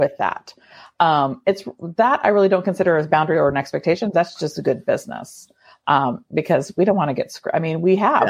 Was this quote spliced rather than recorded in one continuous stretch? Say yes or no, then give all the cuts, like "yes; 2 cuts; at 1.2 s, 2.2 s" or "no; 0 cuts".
no; 0 cuts